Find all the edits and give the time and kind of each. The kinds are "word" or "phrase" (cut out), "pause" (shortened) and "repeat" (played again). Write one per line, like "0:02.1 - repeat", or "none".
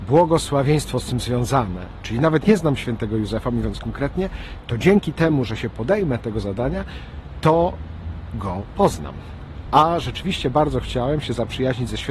0:02.4 - word